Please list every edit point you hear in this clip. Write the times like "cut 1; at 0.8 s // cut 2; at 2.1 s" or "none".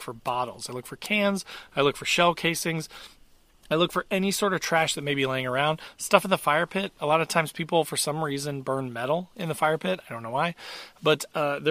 none